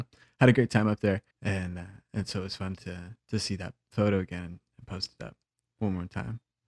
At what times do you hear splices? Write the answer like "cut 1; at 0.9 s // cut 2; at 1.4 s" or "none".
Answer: cut 1; at 1.3 s

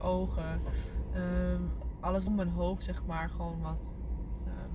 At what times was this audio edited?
cut 1; at 2.3 s

